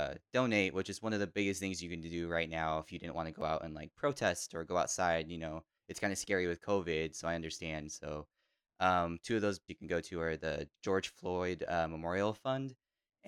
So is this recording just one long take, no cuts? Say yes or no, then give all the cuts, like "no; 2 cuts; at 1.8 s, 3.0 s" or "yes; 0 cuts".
no; 1 cut; at 9.7 s